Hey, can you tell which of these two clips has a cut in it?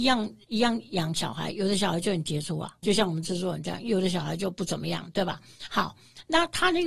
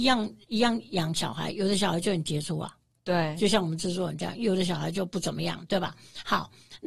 first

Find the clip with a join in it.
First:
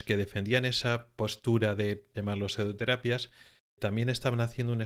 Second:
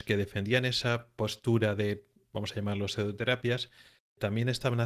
first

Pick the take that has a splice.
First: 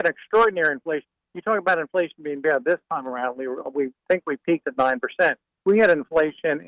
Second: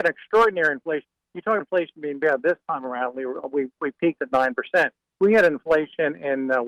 second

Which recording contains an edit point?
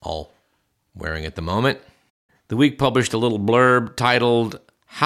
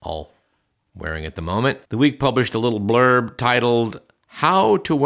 second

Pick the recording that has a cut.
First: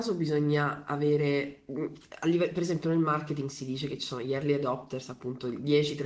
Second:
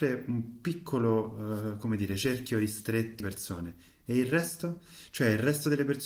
second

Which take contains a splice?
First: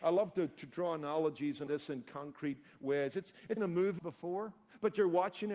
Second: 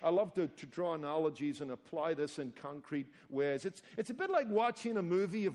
first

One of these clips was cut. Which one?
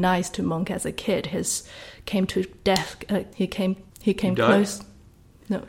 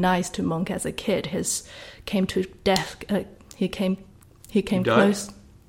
first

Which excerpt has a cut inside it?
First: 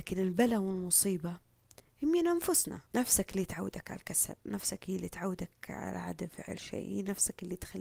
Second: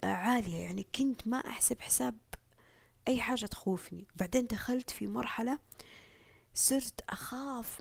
first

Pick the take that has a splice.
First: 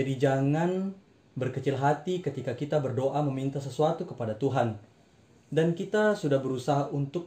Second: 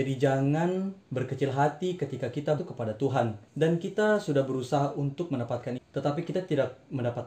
second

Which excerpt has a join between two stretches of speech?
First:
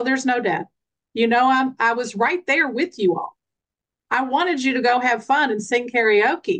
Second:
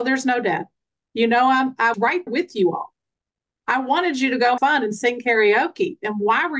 second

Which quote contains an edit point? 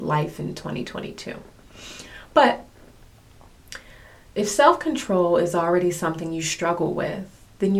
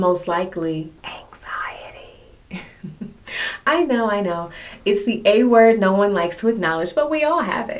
second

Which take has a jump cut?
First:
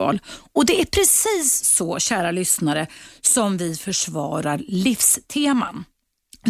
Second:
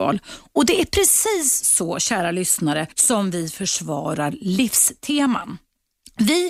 second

